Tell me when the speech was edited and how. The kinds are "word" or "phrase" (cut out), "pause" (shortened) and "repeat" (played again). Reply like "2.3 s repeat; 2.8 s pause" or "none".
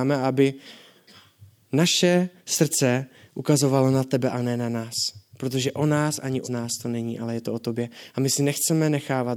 6.4 s word